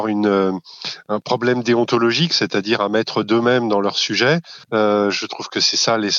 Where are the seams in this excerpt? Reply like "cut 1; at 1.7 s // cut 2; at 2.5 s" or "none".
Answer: cut 1; at 4.6 s